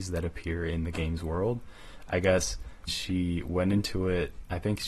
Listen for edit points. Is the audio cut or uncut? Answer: cut